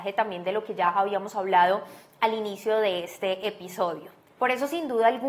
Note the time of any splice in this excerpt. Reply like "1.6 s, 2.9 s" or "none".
none